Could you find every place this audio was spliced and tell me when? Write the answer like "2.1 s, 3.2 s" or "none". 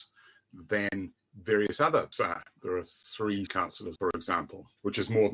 2.1 s, 3.5 s, 4.0 s